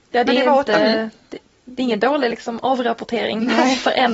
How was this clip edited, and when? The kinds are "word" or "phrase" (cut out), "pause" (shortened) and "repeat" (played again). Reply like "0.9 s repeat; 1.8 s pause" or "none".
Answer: none